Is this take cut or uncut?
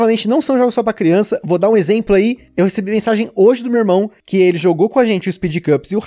uncut